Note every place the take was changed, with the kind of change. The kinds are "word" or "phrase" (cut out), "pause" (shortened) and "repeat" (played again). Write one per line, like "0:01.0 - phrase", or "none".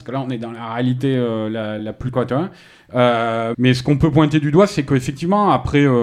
0:01.8 - word
0:02.1 - word
0:03.5 - word